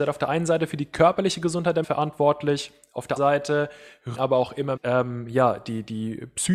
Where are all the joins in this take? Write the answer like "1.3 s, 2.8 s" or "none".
1.8 s, 3.2 s, 4.1 s, 4.8 s